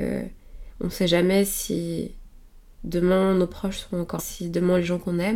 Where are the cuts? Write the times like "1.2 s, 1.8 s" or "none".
4.2 s